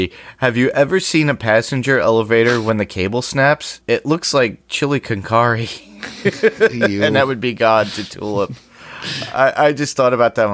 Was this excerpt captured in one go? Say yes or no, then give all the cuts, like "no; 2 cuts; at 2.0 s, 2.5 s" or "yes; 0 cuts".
yes; 0 cuts